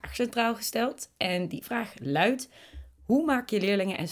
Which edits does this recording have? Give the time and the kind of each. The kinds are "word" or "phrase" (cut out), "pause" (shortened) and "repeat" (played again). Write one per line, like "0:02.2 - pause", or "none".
none